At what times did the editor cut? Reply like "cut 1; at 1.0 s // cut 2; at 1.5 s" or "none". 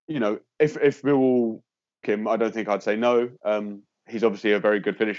cut 1; at 2.0 s